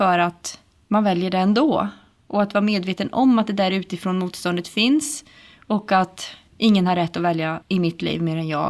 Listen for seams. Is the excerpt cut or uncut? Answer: uncut